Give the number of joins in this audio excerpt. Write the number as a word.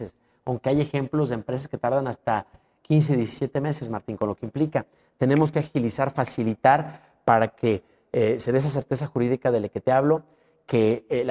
zero